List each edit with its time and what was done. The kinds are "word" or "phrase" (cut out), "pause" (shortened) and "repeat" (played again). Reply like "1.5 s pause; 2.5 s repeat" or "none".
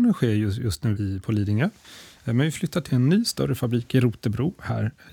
1.0 s word; 2.9 s word